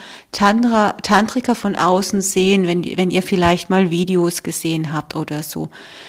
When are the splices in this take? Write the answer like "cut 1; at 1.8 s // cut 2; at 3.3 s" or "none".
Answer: none